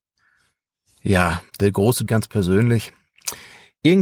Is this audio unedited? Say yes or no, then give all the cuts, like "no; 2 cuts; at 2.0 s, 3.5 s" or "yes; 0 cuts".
no; 2 cuts; at 1.5 s, 2.1 s